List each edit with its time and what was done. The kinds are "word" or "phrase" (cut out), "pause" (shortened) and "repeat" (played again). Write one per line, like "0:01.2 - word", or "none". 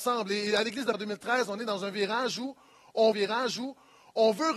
0:00.9 - word
0:03.1 - repeat